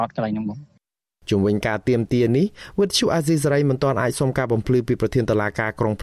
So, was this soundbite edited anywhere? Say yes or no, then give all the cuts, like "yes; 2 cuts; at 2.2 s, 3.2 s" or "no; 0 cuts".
no; 0 cuts